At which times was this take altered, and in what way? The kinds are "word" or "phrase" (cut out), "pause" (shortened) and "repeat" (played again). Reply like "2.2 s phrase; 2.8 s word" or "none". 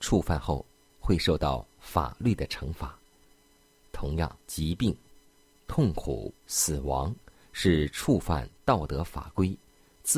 4.4 s pause; 6.4 s pause

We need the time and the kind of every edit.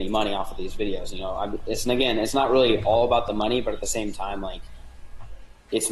none

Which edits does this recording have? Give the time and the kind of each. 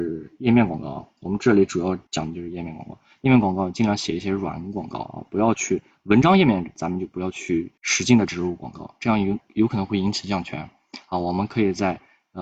2.1 s pause; 7.8 s pause

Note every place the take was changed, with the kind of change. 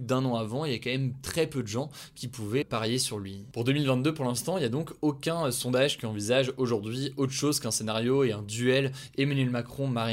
2.6 s word

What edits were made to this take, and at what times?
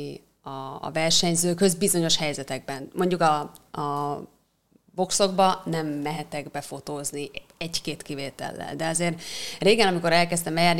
none

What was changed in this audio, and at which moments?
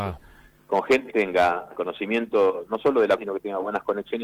1.1 s word; 1.7 s word; 3.2 s word

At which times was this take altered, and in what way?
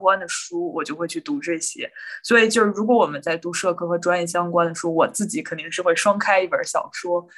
none

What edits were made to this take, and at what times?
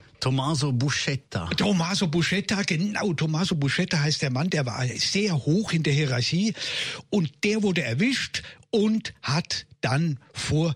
none

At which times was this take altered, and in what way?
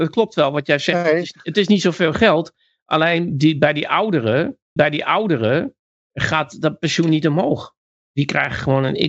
4.8 s repeat

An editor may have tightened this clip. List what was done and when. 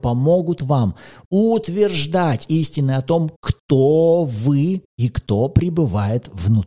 4.9 s pause

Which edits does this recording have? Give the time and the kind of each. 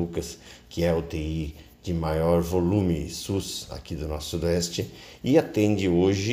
none

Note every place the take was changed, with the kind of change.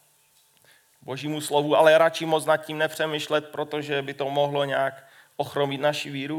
none

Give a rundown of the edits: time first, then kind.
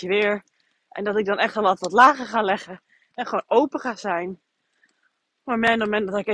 none

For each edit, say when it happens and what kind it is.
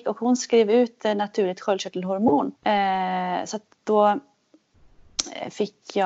2.5 s pause

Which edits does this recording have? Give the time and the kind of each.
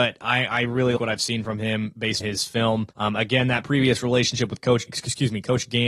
1.0 s word; 2.2 s word; 2.9 s pause; 4.9 s word

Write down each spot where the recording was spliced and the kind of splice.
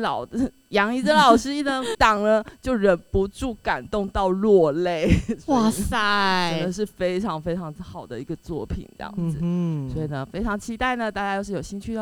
1.9 s phrase

